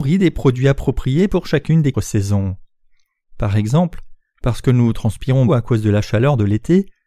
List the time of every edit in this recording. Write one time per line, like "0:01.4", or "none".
0:01.9
0:05.5

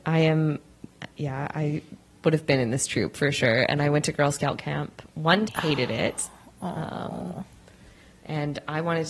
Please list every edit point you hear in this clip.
0:05.5

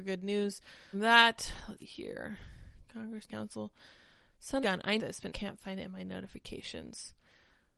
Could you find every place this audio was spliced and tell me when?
0:00.9
0:01.8
0:03.3
0:04.6
0:05.0
0:05.3

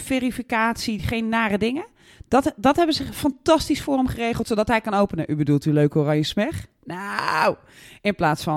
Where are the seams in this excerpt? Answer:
none

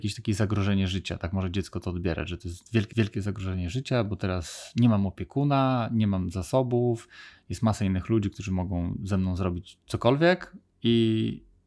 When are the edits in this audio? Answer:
0:02.9

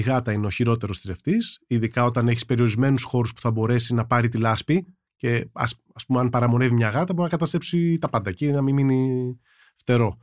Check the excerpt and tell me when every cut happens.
none

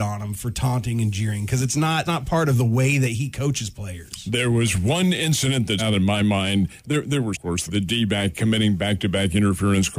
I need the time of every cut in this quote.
0:02.1
0:05.8
0:07.3
0:07.7

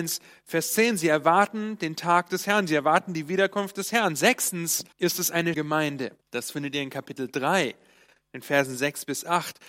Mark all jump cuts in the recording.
0:04.9
0:05.5
0:06.2

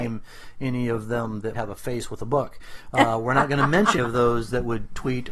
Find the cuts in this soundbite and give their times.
0:01.5
0:04.0

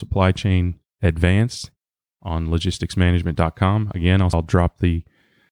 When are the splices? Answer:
none

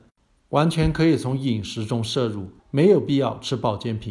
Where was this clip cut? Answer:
0:02.6

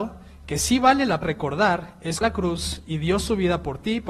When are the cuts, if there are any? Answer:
0:01.2
0:02.2

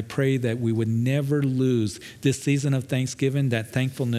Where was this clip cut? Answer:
none

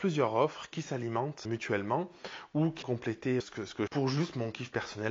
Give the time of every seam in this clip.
0:01.5
0:02.8
0:03.4
0:03.9

